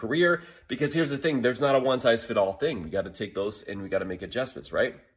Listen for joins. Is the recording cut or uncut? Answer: uncut